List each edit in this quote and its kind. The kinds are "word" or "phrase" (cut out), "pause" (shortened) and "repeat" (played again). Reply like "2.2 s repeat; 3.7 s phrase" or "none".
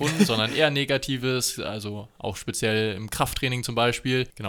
none

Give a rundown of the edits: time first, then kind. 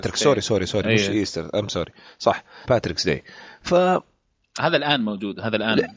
2.6 s word

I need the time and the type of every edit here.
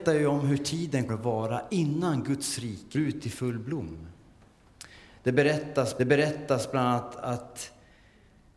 1.1 s word; 2.9 s word; 6.0 s repeat

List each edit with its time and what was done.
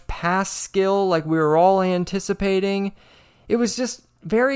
none

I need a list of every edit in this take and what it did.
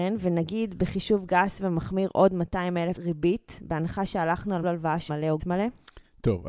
3.0 s word; 4.6 s word; 5.1 s word; 5.4 s word

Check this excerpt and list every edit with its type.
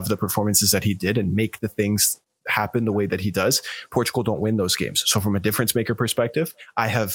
none

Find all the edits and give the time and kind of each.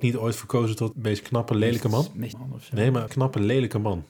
0.9 s word; 2.3 s word; 3.1 s word

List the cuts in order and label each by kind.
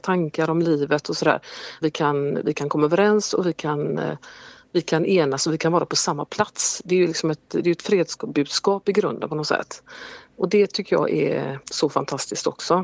1.8 s word; 11.6 s pause

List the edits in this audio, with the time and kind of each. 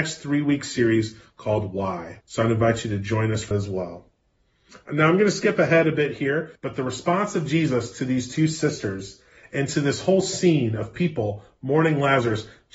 2.2 s pause; 3.5 s word; 6.6 s pause

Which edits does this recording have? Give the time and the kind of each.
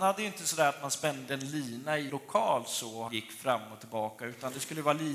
2.1 s word; 3.1 s word

